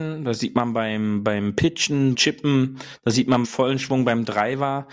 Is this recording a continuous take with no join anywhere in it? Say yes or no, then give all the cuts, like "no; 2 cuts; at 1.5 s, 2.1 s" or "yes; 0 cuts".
no; 2 cuts; at 2.1 s, 3.4 s